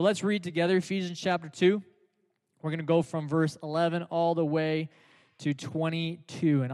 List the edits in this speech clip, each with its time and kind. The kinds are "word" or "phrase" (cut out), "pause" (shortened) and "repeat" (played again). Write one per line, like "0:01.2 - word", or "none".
none